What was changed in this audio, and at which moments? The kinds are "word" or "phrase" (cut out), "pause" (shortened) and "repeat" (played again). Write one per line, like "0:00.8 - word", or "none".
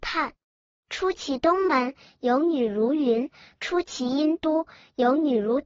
none